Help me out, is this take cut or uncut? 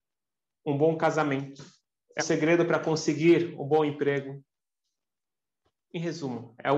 cut